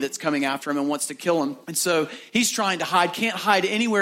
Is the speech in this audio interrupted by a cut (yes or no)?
yes